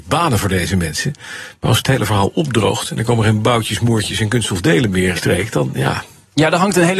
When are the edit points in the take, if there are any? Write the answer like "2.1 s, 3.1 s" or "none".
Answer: 1.8 s, 5.2 s